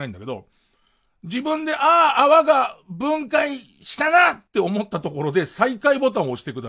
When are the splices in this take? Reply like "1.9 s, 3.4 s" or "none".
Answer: 4.5 s